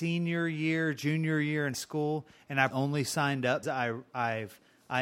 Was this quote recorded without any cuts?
no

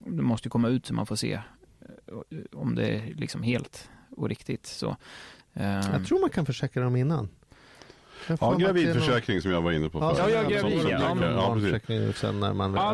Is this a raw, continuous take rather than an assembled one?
yes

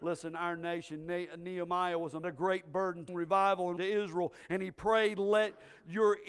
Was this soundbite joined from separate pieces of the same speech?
yes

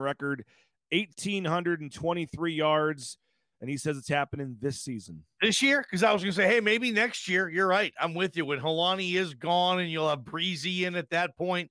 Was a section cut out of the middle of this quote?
no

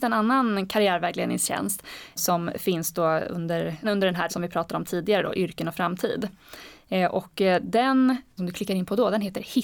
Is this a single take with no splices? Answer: no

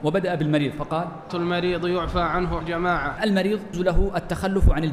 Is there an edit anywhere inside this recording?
yes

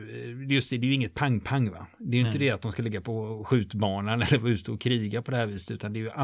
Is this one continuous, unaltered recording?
yes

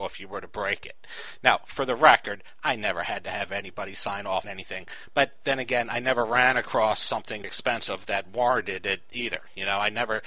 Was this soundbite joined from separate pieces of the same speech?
yes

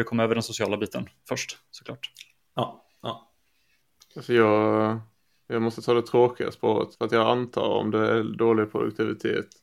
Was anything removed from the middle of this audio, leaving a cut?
yes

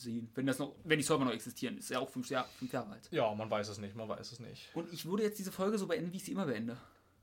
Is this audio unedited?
yes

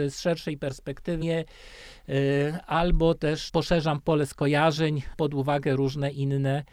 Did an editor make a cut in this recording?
yes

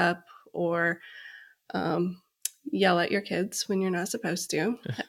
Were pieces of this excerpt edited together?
no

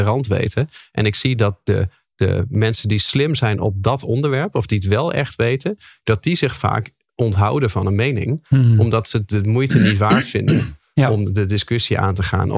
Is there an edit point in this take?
no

